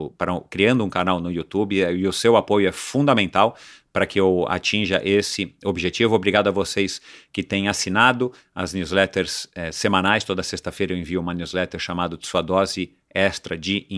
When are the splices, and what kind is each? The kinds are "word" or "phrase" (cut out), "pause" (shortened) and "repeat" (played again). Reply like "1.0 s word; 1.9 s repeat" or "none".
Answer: none